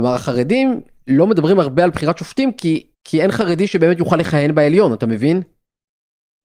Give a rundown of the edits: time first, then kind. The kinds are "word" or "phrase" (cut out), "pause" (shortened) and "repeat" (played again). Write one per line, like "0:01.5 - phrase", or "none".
0:02.9 - pause